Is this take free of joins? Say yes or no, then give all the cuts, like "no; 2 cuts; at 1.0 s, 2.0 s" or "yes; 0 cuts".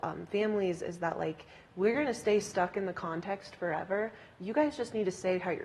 yes; 0 cuts